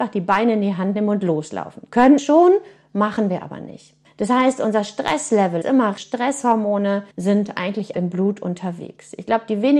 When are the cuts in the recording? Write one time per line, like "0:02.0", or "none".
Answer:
0:02.2
0:04.1
0:05.6
0:06.0
0:07.1
0:07.9